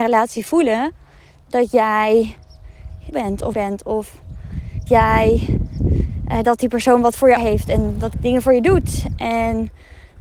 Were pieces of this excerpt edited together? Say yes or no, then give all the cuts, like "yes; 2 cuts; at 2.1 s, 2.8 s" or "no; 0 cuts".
yes; 6 cuts; at 3.1 s, 3.5 s, 4.9 s, 6.4 s, 7.4 s, 8.1 s